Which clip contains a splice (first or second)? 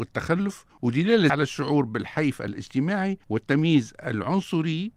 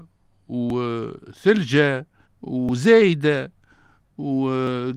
first